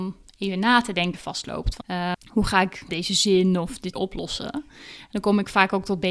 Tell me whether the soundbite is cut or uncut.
cut